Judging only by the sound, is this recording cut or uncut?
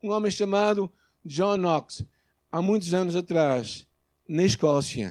uncut